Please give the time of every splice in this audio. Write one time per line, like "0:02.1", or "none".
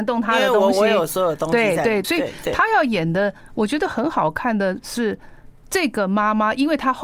0:02.0